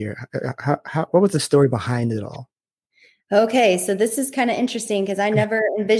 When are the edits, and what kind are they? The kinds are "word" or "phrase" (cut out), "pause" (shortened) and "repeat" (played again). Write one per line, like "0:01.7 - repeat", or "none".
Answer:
none